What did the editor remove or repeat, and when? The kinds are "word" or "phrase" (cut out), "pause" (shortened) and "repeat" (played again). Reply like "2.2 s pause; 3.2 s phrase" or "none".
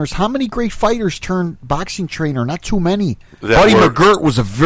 none